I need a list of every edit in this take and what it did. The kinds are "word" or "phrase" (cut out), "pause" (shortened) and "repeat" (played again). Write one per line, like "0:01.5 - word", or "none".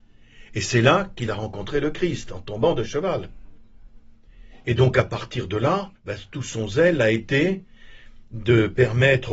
0:06.0 - pause